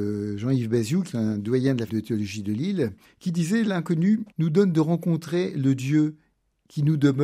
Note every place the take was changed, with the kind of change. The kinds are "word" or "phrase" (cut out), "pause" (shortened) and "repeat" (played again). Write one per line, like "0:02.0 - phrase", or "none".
0:01.1 - word
0:01.9 - word
0:03.0 - pause
0:04.3 - pause